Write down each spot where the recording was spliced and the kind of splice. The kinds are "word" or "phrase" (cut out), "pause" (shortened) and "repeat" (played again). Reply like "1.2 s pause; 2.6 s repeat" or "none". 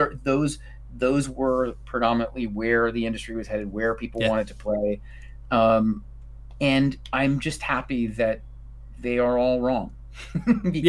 none